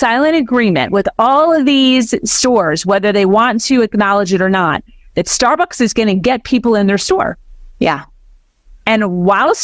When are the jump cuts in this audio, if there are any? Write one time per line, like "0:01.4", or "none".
none